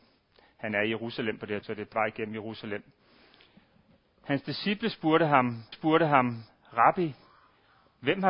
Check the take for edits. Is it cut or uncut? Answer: cut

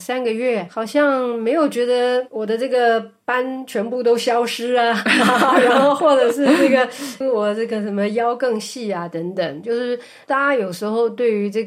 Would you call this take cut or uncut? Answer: cut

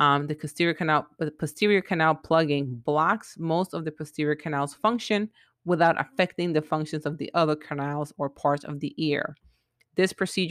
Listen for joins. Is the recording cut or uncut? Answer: uncut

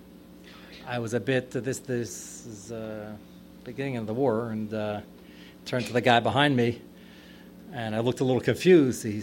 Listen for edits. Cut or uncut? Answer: uncut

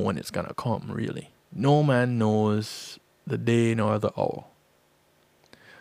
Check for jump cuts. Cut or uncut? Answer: cut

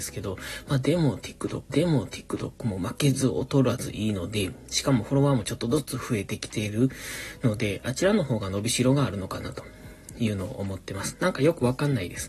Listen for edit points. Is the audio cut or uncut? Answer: cut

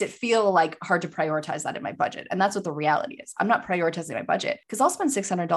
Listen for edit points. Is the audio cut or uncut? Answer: uncut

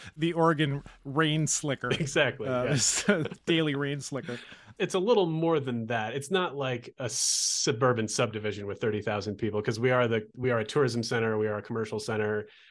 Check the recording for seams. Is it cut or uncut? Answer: uncut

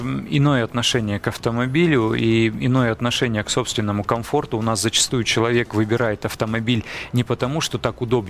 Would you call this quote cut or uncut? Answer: uncut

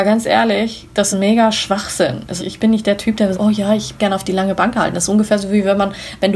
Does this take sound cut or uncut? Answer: cut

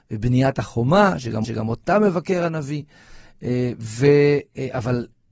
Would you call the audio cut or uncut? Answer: cut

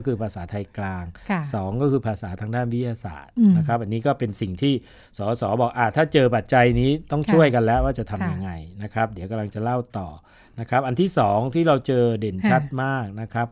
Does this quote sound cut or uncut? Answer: uncut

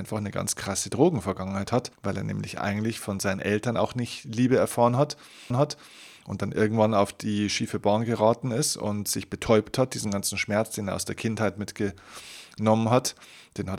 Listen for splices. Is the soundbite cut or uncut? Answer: cut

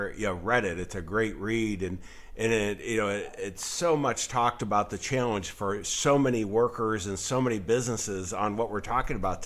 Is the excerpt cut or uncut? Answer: uncut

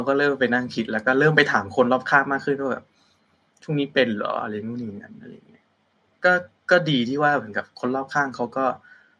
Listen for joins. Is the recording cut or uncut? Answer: uncut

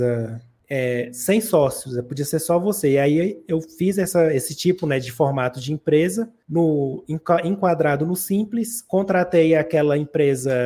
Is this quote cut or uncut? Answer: uncut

